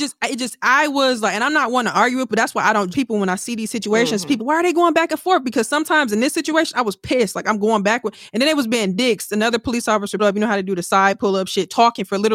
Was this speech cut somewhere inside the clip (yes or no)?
yes